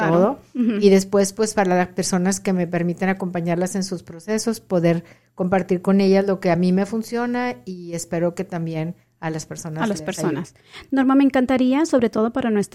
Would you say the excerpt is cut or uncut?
uncut